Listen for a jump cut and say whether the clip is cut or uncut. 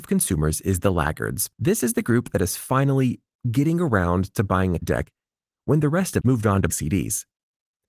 cut